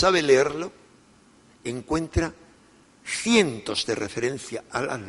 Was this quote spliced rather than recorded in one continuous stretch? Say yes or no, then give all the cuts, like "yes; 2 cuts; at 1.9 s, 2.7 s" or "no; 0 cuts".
no; 0 cuts